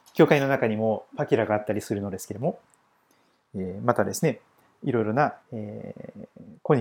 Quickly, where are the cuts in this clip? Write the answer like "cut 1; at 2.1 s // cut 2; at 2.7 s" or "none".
cut 1; at 5.4 s